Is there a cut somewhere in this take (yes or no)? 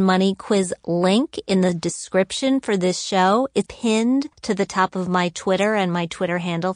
yes